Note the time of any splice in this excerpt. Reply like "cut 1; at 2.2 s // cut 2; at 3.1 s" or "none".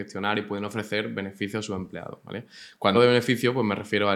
cut 1; at 2.9 s